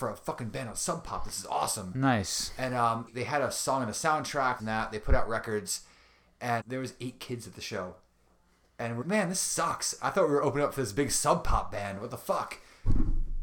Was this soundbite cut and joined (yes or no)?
yes